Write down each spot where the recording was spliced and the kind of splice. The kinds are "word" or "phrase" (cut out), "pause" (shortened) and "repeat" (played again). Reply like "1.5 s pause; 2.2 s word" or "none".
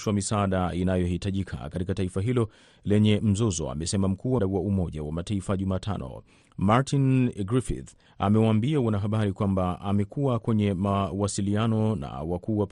4.4 s word